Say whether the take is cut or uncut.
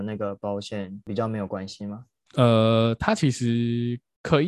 uncut